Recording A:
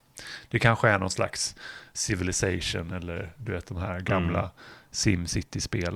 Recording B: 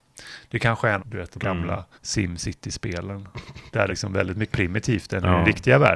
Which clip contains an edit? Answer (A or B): B